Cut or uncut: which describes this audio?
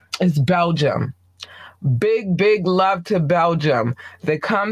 uncut